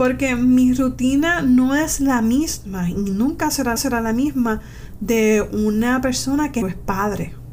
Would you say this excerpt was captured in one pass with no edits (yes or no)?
no